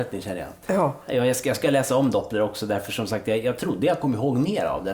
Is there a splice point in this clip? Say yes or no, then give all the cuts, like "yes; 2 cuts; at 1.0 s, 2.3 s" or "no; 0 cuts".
no; 0 cuts